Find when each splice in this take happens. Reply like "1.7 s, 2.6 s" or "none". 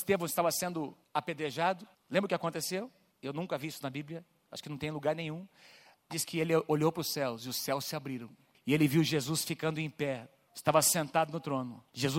6.1 s